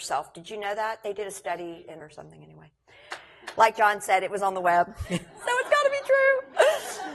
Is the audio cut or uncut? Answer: cut